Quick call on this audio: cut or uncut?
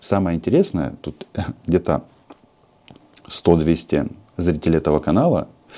uncut